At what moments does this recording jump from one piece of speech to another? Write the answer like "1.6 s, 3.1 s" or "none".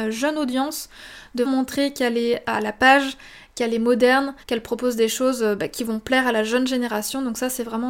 1.5 s, 4.4 s